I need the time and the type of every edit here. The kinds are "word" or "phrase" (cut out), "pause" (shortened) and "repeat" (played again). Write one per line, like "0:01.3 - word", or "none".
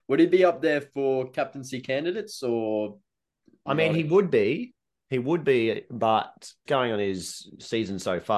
0:06.7 - word